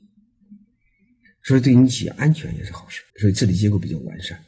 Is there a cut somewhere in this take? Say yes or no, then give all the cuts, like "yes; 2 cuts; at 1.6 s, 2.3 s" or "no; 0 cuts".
yes; 1 cut; at 3.1 s